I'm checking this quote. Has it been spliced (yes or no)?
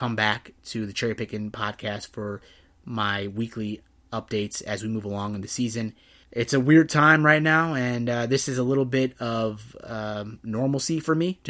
no